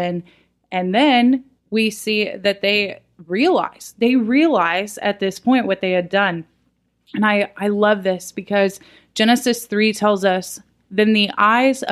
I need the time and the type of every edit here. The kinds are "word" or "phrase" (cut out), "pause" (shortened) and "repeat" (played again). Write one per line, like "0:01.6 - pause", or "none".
0:01.6 - pause